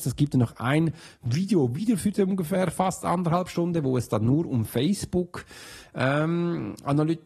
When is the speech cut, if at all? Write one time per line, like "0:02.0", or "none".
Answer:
none